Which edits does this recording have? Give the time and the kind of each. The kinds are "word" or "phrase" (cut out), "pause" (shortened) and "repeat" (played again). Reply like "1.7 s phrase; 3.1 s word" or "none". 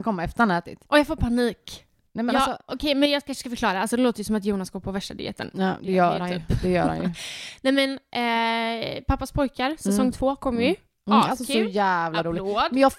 none